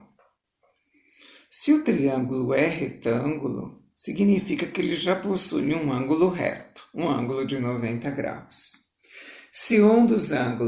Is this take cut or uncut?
uncut